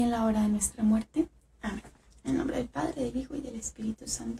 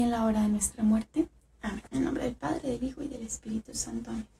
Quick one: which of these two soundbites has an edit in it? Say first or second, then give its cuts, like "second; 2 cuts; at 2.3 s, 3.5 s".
second; 1 cut; at 1.9 s